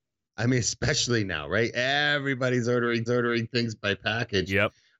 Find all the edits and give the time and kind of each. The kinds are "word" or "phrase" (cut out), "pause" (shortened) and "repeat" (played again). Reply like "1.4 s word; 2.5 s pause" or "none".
3.1 s repeat